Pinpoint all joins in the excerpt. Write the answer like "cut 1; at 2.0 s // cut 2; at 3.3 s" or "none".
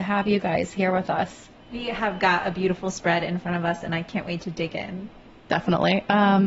cut 1; at 1.6 s